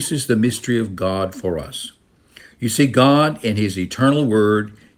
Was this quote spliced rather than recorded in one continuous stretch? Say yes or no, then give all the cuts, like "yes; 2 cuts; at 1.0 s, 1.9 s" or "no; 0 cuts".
no; 0 cuts